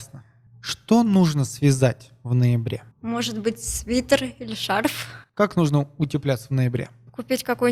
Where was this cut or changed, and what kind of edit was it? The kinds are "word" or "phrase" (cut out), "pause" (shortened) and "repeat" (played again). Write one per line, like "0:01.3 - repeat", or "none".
0:02.9 - pause